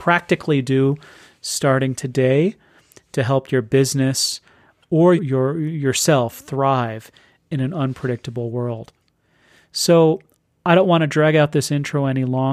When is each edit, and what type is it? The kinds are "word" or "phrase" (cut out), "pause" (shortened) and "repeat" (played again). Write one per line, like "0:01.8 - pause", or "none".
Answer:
0:05.2 - word